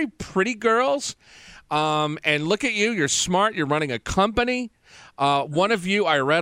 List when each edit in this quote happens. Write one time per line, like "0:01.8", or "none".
none

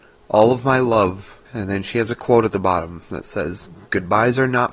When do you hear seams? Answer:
0:01.5

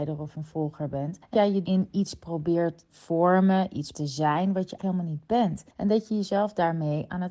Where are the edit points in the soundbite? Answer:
0:01.3
0:01.6
0:02.9
0:03.9
0:04.8

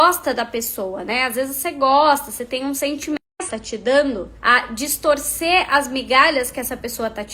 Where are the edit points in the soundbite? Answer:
0:04.4

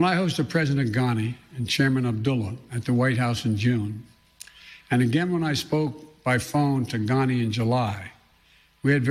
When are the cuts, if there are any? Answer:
none

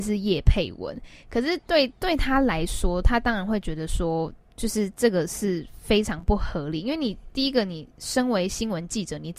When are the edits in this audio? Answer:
0:07.9

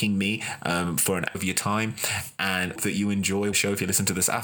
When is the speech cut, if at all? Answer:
0:01.3
0:02.8
0:03.5

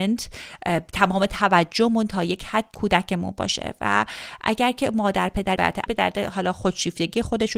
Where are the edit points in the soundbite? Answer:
0:02.7
0:05.6
0:05.9

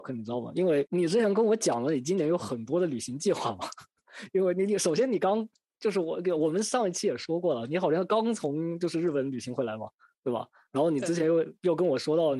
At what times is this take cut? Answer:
none

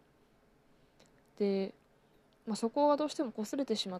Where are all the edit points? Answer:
0:02.1

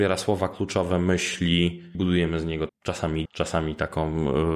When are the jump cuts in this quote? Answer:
0:01.9
0:02.7
0:03.3

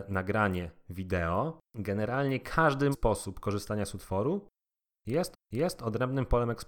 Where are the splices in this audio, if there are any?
0:01.7
0:02.9
0:05.3

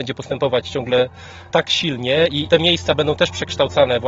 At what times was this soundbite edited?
none

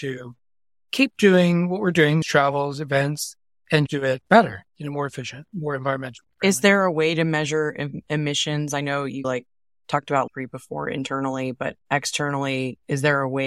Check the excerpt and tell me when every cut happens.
0:02.2
0:03.9
0:04.7
0:09.2
0:10.3
0:11.8

